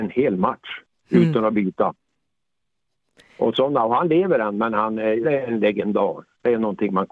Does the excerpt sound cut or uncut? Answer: cut